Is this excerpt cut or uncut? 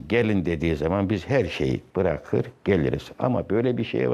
cut